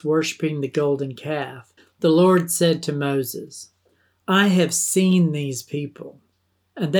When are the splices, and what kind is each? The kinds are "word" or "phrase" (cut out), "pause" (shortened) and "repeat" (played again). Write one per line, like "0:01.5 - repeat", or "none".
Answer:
0:01.8 - pause
0:03.9 - pause

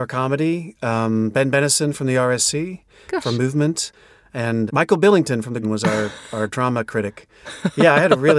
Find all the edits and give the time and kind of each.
0:04.7 - word
0:05.6 - word

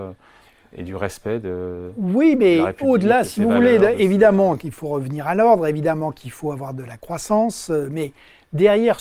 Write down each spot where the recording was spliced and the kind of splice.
none

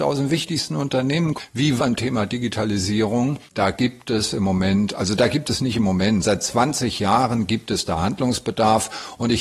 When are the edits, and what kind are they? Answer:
0:01.8 - phrase
0:03.5 - pause
0:06.2 - word

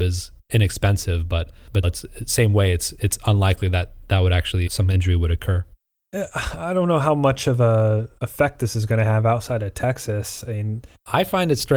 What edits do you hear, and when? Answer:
0:01.8 - word
0:04.7 - word

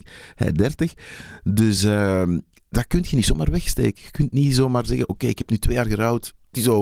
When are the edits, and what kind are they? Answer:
none

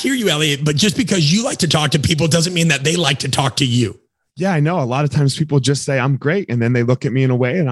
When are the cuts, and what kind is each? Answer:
none

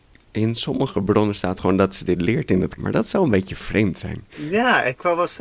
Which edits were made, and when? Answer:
0:02.8 - word

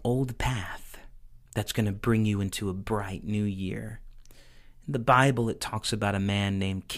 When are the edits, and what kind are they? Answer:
0:01.5 - pause

